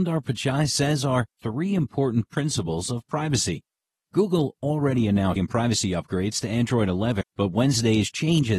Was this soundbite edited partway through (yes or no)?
yes